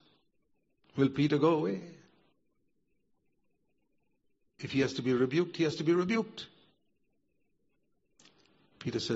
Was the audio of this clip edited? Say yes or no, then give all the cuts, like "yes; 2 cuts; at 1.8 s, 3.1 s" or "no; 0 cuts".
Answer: no; 0 cuts